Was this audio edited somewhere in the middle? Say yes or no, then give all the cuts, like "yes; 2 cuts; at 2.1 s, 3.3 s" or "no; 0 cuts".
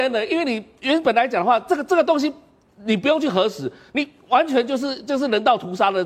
no; 0 cuts